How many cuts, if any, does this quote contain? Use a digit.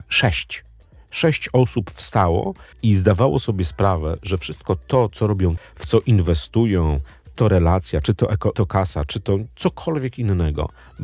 4